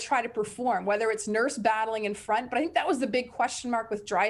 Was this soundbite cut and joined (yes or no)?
no